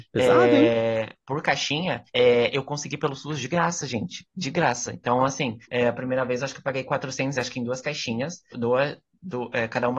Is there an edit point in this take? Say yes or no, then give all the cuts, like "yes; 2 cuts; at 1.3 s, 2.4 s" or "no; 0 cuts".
yes; 4 cuts; at 2.1 s, 5.6 s, 7.3 s, 8.5 s